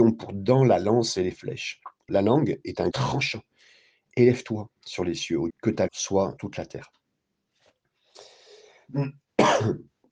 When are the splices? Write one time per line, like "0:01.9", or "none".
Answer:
0:02.1
0:02.9
0:05.5
0:05.9
0:06.4